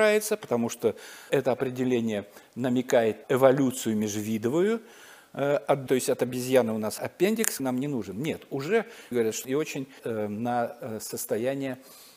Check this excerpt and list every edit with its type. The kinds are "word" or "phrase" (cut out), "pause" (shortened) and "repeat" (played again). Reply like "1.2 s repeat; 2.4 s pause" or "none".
1.3 s word; 3.2 s word; 5.9 s word; 7.0 s word; 7.6 s word; 9.1 s word; 9.4 s word; 10.0 s word